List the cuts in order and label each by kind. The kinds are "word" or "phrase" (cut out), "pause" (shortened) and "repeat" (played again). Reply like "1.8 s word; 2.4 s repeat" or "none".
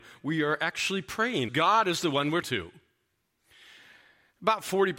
1.5 s phrase; 2.4 s word

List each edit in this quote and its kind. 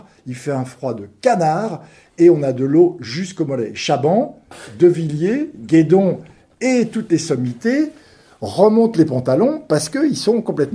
none

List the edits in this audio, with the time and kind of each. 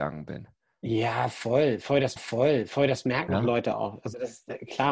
2.2 s repeat

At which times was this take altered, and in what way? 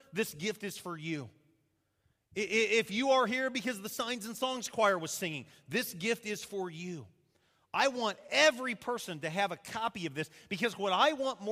none

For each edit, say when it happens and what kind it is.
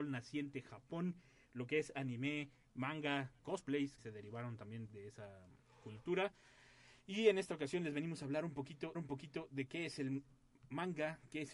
3.4 s word; 4.0 s word; 4.9 s word; 8.9 s repeat

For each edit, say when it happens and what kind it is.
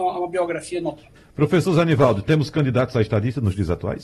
1.2 s pause

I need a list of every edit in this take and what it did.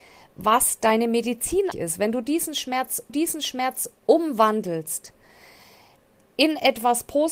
1.7 s word; 3.1 s repeat

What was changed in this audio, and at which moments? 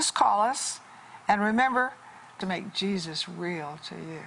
2.4 s phrase

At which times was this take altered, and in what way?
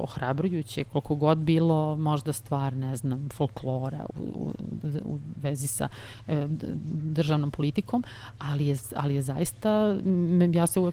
4.1 s word

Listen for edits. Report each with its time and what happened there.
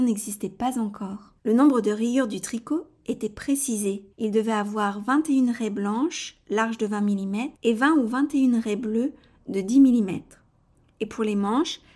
1.4 s pause; 4.1 s pause; 7.5 s pause

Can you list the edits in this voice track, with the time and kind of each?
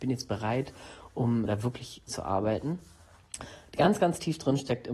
1.5 s word; 2.1 s phrase

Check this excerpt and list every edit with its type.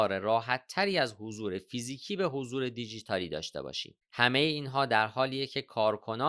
4.0 s pause

